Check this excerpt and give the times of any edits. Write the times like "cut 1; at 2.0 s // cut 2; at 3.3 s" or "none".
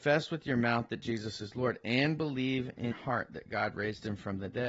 cut 1; at 2.9 s